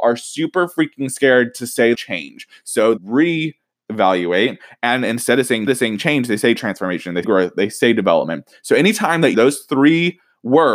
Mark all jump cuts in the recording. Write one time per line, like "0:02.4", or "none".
0:01.9
0:03.0
0:05.7
0:07.2
0:09.3